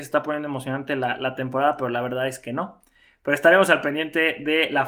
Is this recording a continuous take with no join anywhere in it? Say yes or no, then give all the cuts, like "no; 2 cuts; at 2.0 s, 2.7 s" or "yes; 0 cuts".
yes; 0 cuts